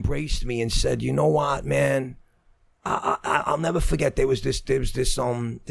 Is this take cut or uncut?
uncut